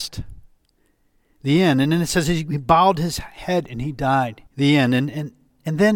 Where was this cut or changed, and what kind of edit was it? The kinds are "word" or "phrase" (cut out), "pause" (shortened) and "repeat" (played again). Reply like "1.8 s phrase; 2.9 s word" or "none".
4.5 s pause